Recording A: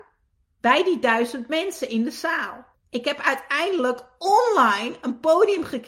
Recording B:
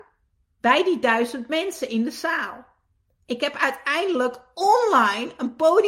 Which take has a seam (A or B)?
A